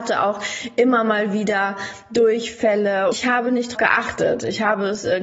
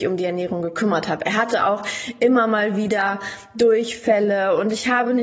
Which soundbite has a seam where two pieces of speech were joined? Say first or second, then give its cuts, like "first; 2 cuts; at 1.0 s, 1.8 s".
first; 2 cuts; at 3.1 s, 3.7 s